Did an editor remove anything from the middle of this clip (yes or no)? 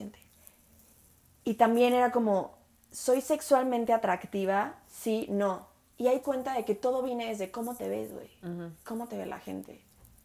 yes